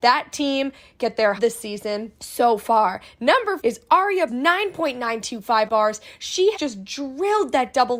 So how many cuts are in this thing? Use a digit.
6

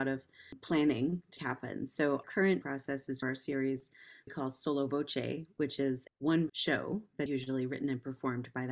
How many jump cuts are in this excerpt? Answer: 8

